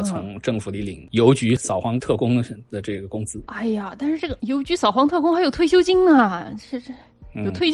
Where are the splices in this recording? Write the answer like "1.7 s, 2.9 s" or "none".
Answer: none